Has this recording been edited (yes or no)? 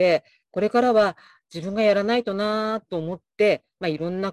no